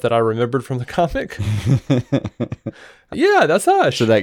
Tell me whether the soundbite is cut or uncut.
cut